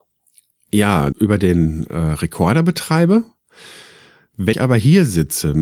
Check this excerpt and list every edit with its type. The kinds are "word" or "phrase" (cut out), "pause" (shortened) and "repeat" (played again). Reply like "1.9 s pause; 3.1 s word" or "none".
1.1 s word; 4.5 s word